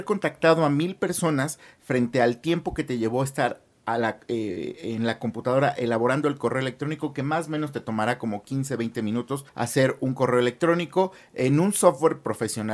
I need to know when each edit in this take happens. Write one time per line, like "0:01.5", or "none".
0:09.5